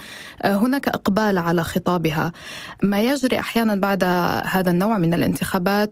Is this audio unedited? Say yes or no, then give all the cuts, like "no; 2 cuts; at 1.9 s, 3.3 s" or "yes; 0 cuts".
yes; 0 cuts